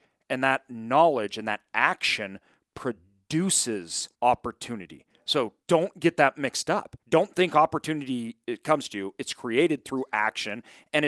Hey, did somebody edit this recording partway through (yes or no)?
yes